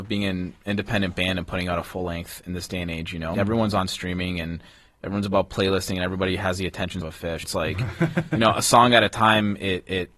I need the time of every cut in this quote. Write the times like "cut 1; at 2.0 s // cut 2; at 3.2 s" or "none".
cut 1; at 3.3 s // cut 2; at 7.0 s // cut 3; at 7.4 s

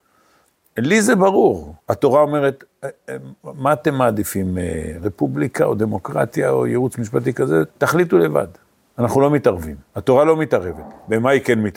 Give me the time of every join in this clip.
cut 1; at 1.8 s // cut 2; at 7.7 s // cut 3; at 8.6 s // cut 4; at 9.9 s

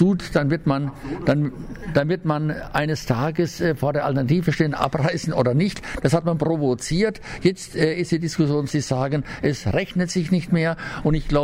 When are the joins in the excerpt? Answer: cut 1; at 8.7 s

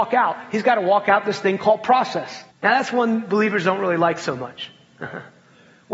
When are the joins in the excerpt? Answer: cut 1; at 2.5 s

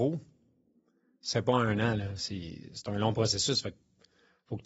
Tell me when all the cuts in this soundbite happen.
cut 1; at 1.3 s

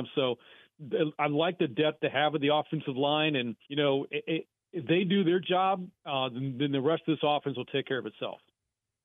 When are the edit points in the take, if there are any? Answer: cut 1; at 3.6 s // cut 2; at 4.1 s // cut 3; at 6.0 s

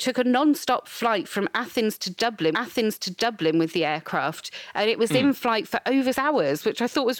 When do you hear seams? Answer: cut 1; at 2.5 s // cut 2; at 6.1 s

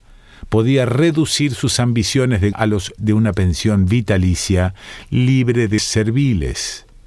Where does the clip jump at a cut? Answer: cut 1; at 2.5 s // cut 2; at 3.0 s // cut 3; at 5.8 s

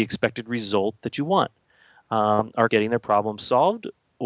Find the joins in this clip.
cut 1; at 2.7 s

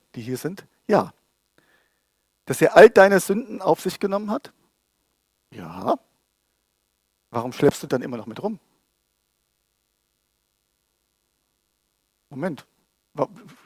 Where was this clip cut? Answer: cut 1; at 7.9 s

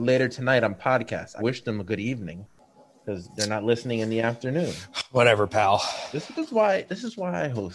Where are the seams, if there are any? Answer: cut 1; at 1.4 s // cut 2; at 6.4 s

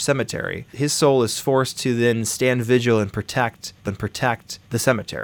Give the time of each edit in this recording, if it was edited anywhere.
cut 1; at 3.9 s

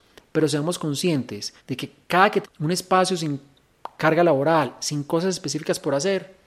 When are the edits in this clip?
cut 1; at 1.6 s // cut 2; at 2.4 s

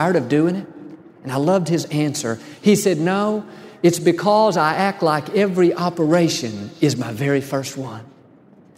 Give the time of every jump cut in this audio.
none

